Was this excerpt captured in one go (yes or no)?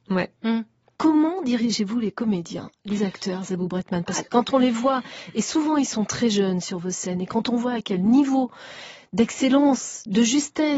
yes